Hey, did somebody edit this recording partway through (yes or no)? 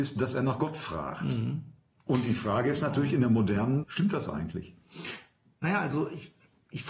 yes